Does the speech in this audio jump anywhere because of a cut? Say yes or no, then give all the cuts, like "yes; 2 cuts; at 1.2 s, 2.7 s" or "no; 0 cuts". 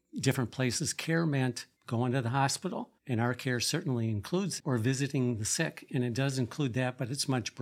yes; 3 cuts; at 1.8 s, 3.0 s, 4.6 s